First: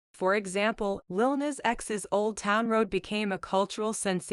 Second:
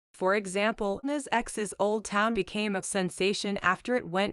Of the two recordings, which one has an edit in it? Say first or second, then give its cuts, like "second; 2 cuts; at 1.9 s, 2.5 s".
second; 3 cuts; at 1.0 s, 2.3 s, 2.8 s